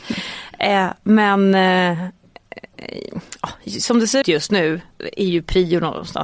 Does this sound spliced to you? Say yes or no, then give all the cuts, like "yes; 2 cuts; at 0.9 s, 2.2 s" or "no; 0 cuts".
yes; 2 cuts; at 4.2 s, 4.9 s